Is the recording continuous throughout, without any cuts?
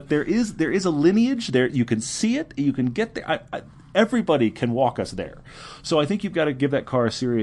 yes; 0 cuts

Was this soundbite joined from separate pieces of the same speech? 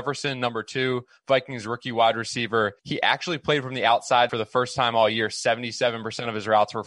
yes; 2 cuts; at 2.8 s, 4.3 s

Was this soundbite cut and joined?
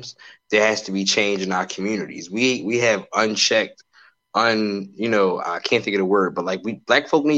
no; 0 cuts

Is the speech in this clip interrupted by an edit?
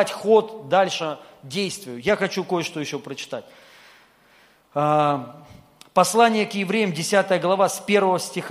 no; 0 cuts

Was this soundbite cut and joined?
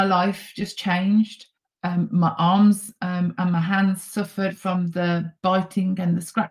yes; 1 cut; at 1.6 s

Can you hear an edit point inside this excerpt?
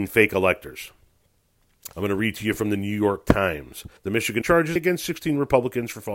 yes; 4 cuts; at 1.9 s, 4.0 s, 4.4 s, 4.8 s

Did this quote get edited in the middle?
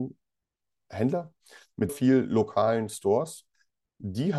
yes; 1 cut; at 1.9 s

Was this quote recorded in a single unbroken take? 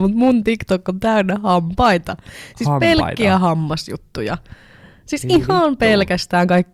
yes; 0 cuts

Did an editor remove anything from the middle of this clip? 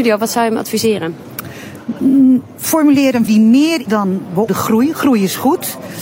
yes; 3 cuts; at 3.3 s, 3.8 s, 4.5 s

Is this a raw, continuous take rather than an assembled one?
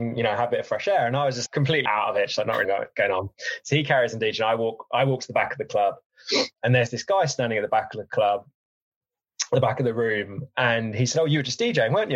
no; 3 cuts; at 1.5 s, 1.9 s, 2.6 s

